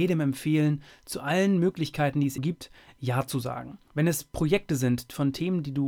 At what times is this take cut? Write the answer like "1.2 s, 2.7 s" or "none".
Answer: 2.4 s, 3.9 s